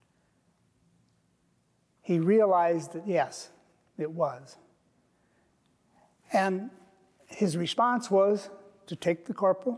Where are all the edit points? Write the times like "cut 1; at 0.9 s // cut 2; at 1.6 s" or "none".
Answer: none